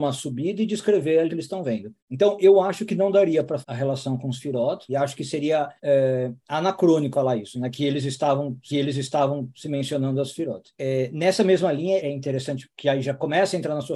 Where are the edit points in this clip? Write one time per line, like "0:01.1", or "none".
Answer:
0:01.3
0:02.0
0:03.6
0:04.9
0:05.8
0:07.1
0:08.7
0:10.7
0:12.0